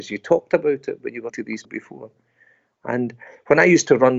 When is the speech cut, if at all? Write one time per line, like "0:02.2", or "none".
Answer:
0:01.3
0:01.6